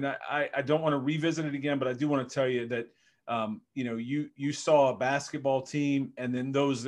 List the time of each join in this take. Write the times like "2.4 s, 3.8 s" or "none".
none